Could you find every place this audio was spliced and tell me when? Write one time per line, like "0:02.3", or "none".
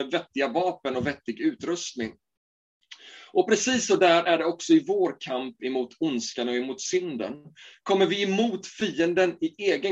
none